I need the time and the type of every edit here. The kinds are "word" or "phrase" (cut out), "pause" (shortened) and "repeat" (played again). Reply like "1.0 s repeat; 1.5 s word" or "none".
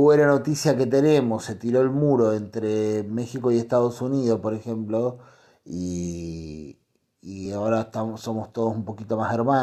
none